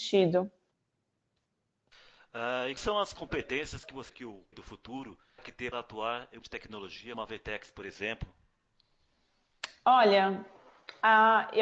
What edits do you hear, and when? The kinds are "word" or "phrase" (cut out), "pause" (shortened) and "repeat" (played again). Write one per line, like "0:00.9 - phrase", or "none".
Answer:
0:02.8 - word
0:03.1 - word
0:04.1 - word
0:04.5 - word
0:05.4 - word
0:05.7 - word
0:06.4 - word
0:07.1 - word